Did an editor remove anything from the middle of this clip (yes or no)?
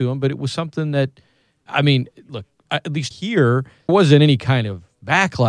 yes